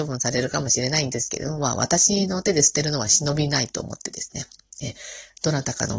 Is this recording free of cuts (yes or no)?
yes